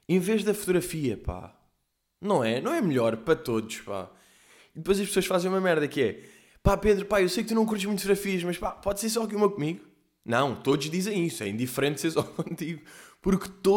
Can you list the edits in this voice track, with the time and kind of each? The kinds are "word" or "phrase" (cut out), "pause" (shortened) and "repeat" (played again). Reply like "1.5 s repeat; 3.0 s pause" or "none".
none